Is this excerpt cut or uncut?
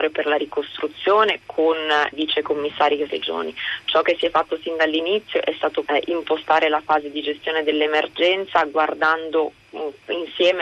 cut